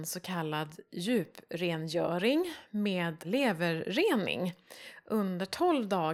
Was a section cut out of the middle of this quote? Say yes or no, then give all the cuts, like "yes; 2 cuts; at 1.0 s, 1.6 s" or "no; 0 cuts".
yes; 1 cut; at 3.2 s